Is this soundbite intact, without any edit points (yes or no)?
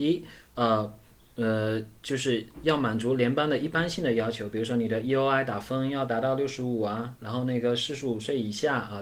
yes